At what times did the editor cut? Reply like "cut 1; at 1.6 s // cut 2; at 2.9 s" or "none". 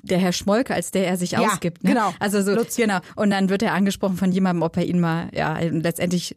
none